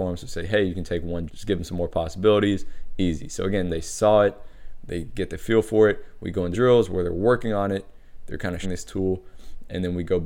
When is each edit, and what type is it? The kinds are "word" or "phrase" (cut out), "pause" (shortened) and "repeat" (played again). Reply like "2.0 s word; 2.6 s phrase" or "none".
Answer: 1.3 s word; 3.7 s word; 6.5 s word; 8.6 s word